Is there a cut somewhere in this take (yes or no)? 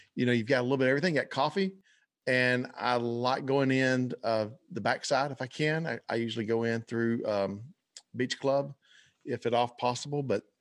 no